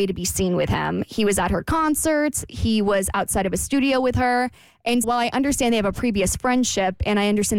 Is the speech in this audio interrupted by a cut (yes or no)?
yes